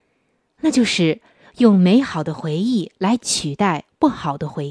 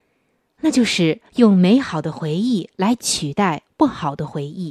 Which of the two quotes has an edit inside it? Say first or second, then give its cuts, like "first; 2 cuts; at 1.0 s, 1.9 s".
second; 1 cut; at 1.3 s